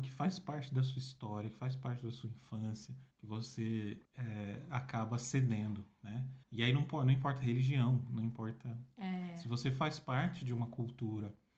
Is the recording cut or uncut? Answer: cut